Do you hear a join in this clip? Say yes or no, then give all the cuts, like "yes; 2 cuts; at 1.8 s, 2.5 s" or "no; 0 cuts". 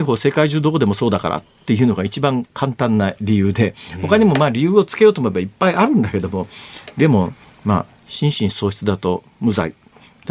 yes; 1 cut; at 7.4 s